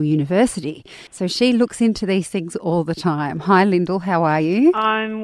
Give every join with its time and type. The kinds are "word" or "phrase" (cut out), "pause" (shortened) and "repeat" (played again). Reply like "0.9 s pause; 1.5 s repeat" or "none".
1.1 s pause